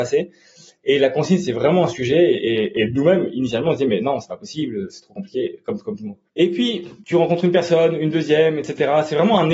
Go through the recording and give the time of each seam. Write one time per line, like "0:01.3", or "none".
0:06.3